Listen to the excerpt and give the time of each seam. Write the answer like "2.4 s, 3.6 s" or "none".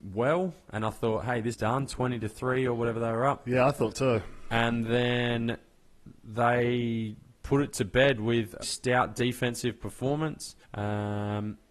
1.5 s, 3.9 s, 8.6 s, 10.6 s